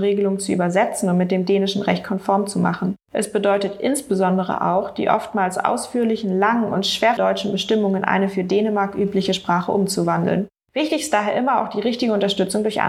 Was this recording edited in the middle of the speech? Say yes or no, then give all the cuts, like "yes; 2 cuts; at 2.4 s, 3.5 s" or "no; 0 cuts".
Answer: yes; 1 cut; at 7.2 s